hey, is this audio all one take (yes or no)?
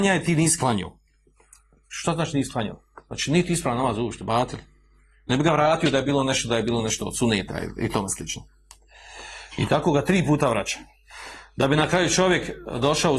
yes